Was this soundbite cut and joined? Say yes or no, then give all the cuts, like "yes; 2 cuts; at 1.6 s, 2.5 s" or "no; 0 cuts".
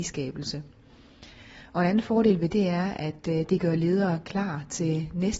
yes; 1 cut; at 2.5 s